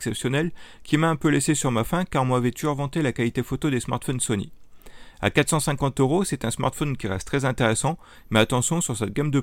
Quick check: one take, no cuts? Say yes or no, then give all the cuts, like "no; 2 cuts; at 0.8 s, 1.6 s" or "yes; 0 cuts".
yes; 0 cuts